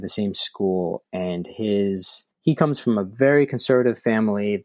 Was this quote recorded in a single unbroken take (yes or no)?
no